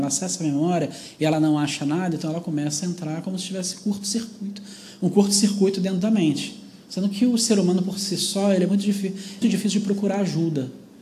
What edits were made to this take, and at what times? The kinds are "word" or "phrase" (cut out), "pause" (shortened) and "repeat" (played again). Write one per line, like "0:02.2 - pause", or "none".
0:09.4 - word